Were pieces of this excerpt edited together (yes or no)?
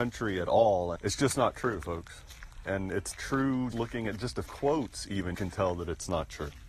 yes